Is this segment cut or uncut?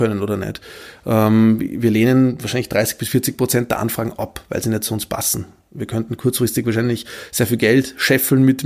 uncut